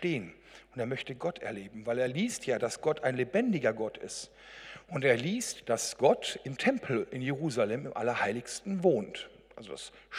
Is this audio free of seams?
yes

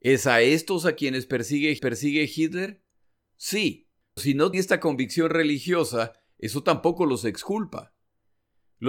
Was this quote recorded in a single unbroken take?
no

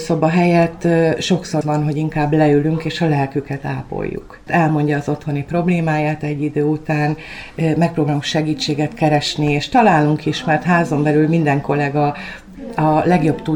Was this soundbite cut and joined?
yes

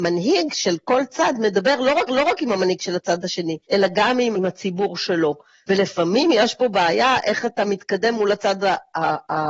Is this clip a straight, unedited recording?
no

